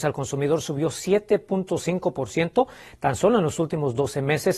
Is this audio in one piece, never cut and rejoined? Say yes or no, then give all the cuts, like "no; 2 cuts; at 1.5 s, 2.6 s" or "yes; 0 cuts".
yes; 0 cuts